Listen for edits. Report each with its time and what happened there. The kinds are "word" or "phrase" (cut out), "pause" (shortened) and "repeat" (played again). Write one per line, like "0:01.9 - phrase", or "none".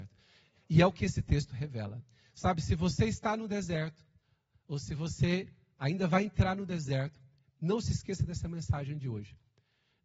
none